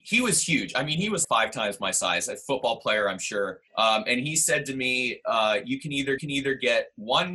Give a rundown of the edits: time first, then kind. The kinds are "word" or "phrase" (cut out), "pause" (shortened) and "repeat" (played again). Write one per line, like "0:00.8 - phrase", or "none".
0:01.2 - word
0:03.7 - pause
0:06.2 - repeat